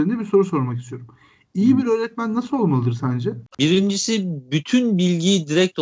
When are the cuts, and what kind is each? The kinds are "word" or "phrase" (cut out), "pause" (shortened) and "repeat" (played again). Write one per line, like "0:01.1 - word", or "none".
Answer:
none